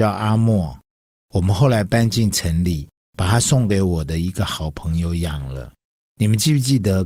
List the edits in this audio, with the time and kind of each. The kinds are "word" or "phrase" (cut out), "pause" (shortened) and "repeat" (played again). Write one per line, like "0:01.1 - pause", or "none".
none